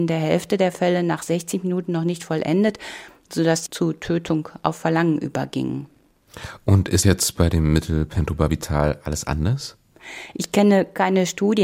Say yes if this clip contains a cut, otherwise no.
yes